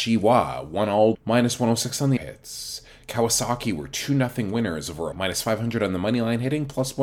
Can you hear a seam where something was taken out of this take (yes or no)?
yes